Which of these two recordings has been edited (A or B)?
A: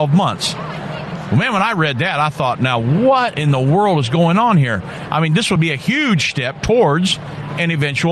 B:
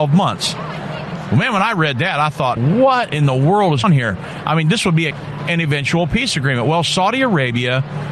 B